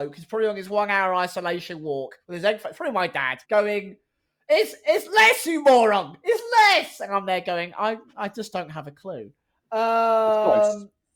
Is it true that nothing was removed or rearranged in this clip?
no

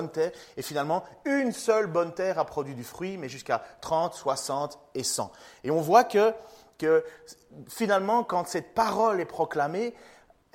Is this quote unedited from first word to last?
yes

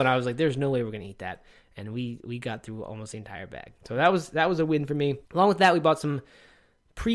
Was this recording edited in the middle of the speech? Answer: yes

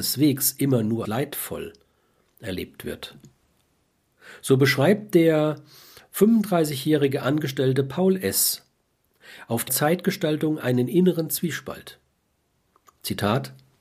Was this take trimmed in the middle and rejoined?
yes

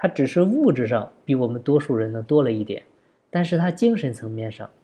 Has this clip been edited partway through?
no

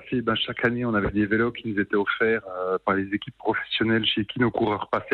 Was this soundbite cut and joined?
no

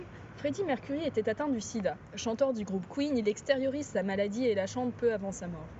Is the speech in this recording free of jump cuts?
yes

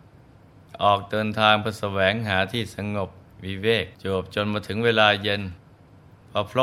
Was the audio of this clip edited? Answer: yes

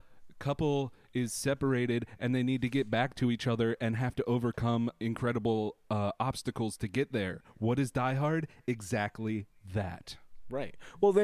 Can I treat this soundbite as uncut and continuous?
yes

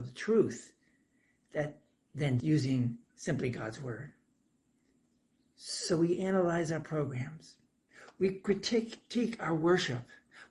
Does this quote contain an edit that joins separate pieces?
yes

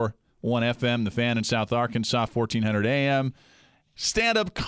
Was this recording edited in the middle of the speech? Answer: no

